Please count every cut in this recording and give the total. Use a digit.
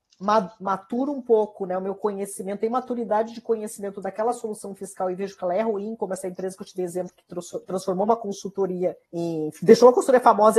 1